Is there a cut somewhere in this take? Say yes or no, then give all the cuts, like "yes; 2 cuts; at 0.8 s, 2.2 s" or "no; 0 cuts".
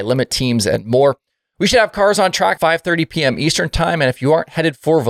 yes; 1 cut; at 2.6 s